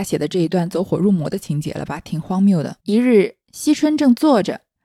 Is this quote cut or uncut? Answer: cut